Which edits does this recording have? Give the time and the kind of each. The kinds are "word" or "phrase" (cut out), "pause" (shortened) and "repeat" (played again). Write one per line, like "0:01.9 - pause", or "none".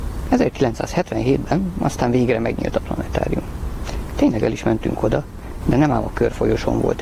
none